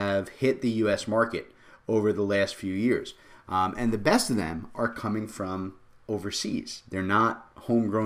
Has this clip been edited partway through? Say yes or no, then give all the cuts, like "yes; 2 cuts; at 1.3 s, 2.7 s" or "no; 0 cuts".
no; 0 cuts